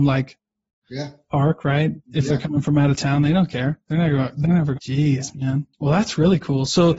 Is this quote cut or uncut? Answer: cut